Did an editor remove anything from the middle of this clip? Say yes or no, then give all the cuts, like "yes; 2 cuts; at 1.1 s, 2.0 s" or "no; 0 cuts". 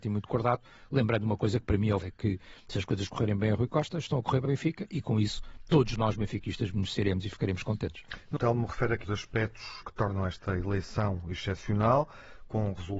yes; 5 cuts; at 2.0 s, 4.4 s, 8.4 s, 9.0 s, 9.8 s